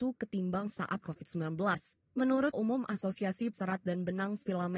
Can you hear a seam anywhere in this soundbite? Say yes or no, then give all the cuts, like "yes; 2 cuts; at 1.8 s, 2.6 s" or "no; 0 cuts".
yes; 3 cuts; at 1.0 s, 2.5 s, 3.5 s